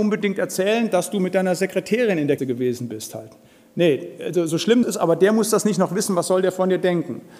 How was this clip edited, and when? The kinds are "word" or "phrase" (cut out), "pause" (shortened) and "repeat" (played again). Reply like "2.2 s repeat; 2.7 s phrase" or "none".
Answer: 2.4 s word; 4.8 s word